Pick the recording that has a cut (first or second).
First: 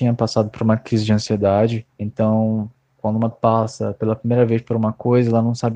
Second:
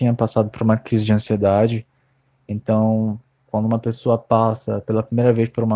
first